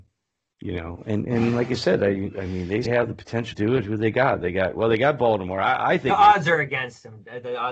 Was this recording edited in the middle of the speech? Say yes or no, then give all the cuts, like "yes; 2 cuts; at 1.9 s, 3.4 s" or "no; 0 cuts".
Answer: yes; 2 cuts; at 2.9 s, 3.5 s